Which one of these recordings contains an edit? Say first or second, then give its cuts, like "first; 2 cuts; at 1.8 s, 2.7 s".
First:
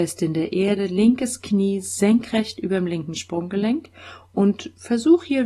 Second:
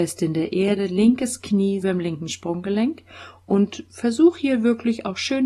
second; 1 cut; at 1.8 s